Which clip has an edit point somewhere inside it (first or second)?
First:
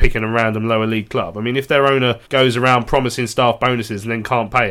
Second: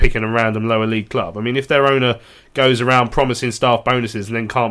first